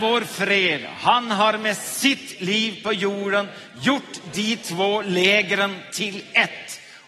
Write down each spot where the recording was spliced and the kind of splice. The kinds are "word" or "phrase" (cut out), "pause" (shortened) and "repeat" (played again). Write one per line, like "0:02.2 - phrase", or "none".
none